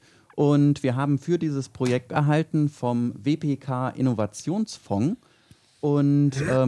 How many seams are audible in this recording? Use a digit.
1